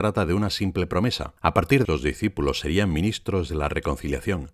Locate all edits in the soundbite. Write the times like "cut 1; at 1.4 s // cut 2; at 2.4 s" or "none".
cut 1; at 1.4 s // cut 2; at 1.8 s